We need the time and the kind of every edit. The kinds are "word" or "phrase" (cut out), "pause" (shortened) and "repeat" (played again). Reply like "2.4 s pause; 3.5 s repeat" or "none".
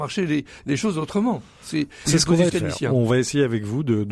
2.0 s word; 2.5 s word